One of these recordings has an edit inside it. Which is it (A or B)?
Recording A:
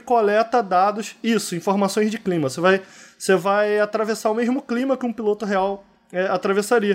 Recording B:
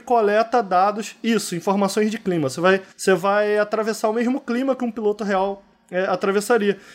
B